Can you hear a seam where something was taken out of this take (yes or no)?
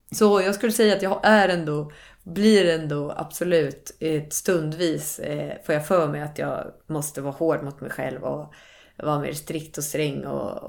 no